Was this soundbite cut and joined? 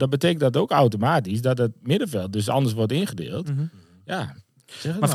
no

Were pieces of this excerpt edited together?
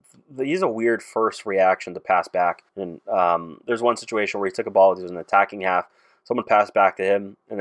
yes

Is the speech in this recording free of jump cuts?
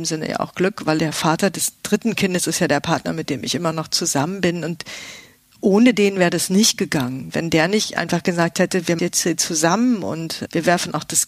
no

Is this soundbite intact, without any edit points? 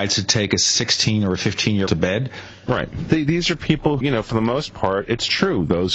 no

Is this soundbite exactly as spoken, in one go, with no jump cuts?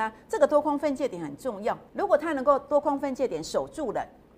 no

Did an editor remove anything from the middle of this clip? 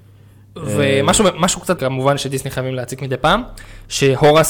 yes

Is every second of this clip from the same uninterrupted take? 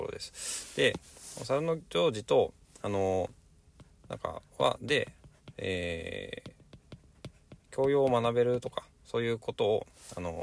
yes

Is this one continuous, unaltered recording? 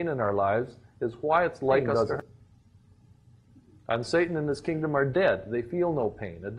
yes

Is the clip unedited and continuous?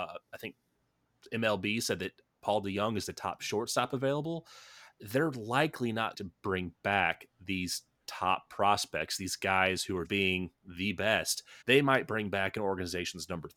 no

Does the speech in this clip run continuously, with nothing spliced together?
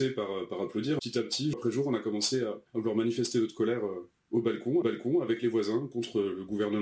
no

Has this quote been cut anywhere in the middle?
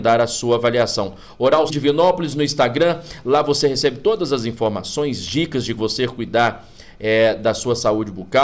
yes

